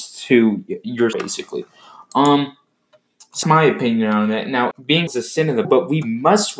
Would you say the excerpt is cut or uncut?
cut